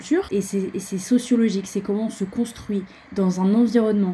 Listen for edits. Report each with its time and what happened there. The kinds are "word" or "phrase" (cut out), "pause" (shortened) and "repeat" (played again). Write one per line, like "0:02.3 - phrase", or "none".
none

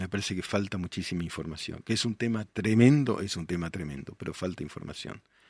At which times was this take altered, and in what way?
none

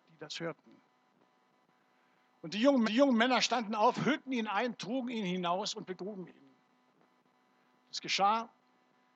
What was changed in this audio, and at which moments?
0:02.8 - repeat

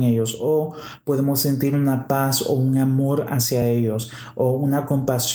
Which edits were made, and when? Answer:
none

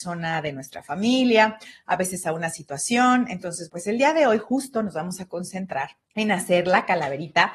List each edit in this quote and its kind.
0:03.7 - word
0:06.0 - pause

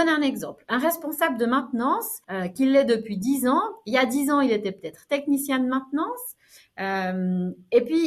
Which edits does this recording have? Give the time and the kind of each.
0:02.2 - pause

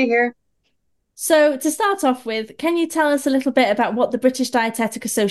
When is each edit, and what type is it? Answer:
none

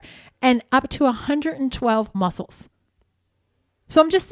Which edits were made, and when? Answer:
0:02.1 - word

